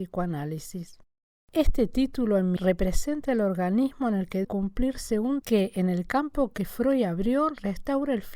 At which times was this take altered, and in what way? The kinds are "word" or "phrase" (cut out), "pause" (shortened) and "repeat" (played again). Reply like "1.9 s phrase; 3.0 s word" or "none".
2.6 s word; 4.4 s word; 5.4 s word